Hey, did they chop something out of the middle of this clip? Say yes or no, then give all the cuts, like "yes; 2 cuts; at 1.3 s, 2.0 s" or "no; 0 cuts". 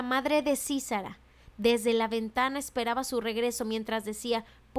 no; 0 cuts